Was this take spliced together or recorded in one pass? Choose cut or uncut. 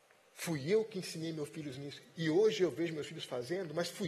uncut